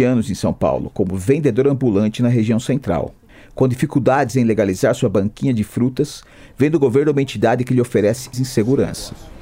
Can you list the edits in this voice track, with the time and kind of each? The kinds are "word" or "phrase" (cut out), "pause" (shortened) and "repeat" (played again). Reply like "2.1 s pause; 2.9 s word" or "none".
3.3 s pause; 8.3 s word